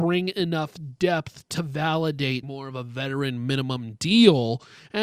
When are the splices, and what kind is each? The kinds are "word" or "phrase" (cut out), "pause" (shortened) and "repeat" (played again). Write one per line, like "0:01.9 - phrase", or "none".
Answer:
0:02.4 - phrase